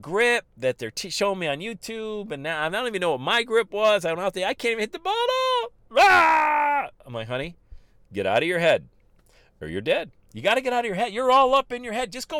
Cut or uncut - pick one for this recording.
uncut